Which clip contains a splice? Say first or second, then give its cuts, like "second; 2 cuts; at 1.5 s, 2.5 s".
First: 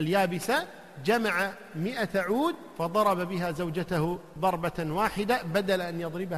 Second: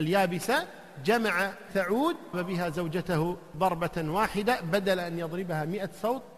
second; 2 cuts; at 1.7 s, 2.3 s